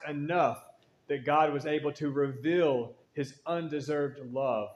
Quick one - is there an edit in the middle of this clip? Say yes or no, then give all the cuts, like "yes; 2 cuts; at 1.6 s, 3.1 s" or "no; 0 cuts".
yes; 1 cut; at 3.0 s